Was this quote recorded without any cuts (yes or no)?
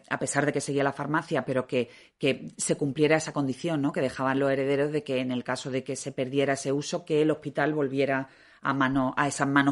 yes